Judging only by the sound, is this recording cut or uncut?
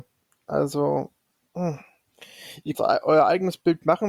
cut